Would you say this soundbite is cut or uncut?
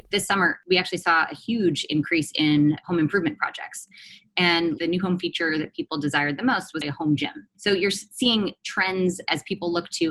cut